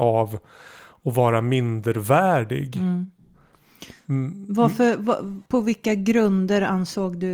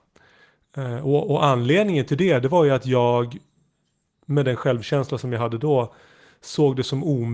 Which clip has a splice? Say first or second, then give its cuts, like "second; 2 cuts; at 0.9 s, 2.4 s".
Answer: first; 1 cut; at 5.5 s